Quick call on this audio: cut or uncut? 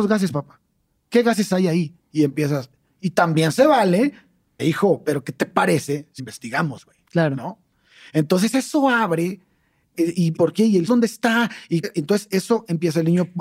cut